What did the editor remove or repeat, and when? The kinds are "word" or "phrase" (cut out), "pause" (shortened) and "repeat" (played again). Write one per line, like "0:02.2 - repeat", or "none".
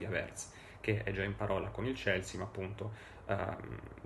none